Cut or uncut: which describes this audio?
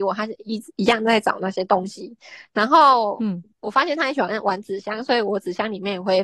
uncut